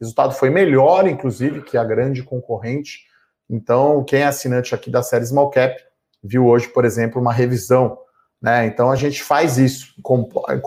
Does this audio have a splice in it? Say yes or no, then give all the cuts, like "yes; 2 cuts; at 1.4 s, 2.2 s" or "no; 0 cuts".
no; 0 cuts